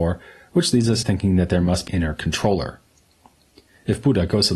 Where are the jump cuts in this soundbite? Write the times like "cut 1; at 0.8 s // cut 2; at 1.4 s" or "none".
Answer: cut 1; at 1.0 s // cut 2; at 1.9 s